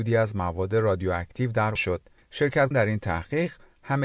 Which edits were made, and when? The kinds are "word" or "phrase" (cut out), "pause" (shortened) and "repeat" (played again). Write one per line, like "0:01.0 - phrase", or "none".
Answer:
0:01.8 - word
0:02.7 - word